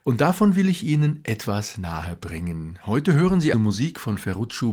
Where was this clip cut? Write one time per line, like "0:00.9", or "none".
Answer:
0:03.5